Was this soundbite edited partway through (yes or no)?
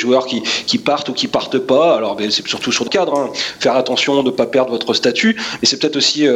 yes